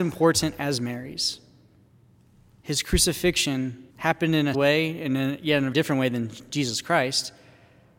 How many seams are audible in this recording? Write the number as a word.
four